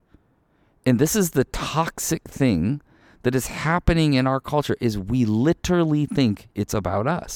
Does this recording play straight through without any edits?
yes; 0 cuts

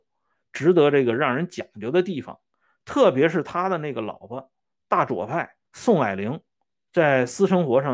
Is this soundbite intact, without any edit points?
no; 1 cut; at 5.6 s

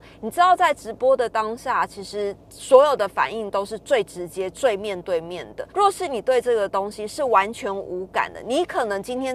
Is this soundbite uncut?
no; 1 cut; at 5.7 s

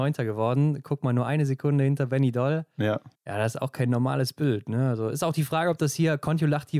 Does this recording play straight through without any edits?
yes; 0 cuts

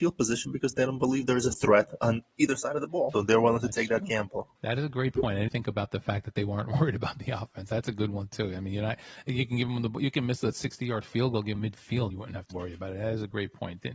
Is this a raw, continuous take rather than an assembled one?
no; 6 cuts; at 3.1 s, 4.6 s, 5.5 s, 11.5 s, 12.1 s, 12.5 s

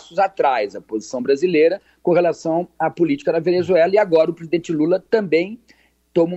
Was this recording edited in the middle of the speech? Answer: no; 0 cuts

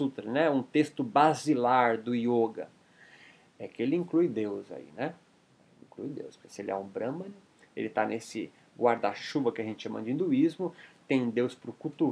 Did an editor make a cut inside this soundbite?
no; 0 cuts

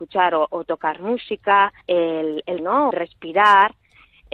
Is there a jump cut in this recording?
yes; 3 cuts; at 1.8 s, 2.6 s, 2.9 s

